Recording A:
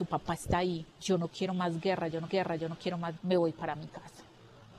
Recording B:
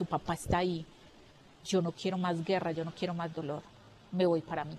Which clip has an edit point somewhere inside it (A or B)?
A